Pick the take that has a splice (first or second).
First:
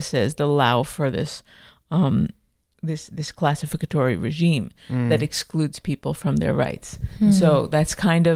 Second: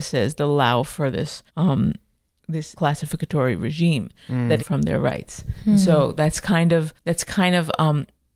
second